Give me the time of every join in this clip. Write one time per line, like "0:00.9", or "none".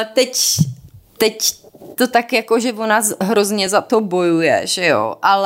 none